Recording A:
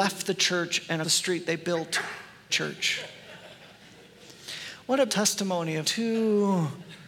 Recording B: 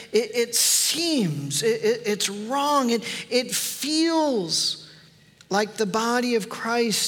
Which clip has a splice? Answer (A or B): A